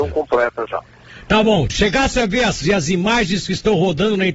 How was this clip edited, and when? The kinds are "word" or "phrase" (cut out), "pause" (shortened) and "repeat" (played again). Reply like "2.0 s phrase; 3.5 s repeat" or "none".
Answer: 1.7 s word; 2.6 s word